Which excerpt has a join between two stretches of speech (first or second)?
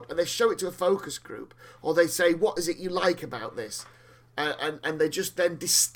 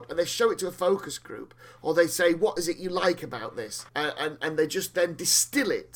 second